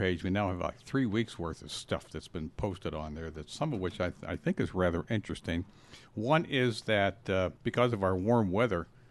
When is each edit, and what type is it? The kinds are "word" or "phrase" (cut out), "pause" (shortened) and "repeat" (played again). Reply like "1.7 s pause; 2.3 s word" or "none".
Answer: 7.6 s pause